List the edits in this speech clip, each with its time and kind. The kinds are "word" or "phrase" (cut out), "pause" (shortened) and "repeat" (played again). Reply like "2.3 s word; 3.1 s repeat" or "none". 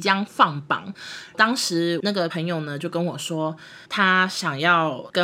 3.8 s pause